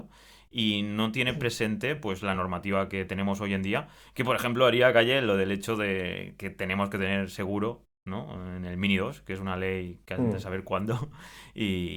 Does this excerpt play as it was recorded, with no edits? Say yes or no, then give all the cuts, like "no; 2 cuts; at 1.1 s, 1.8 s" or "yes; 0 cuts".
yes; 0 cuts